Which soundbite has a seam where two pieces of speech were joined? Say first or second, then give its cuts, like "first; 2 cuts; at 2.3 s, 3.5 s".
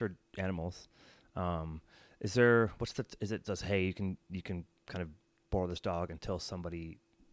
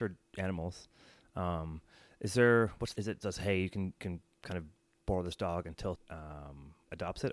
second; 3 cuts; at 2.9 s, 4.0 s, 5.9 s